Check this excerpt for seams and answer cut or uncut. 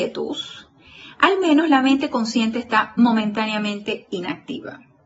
uncut